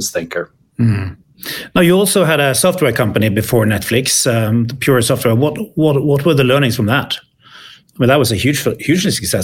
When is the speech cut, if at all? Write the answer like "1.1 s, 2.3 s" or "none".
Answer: none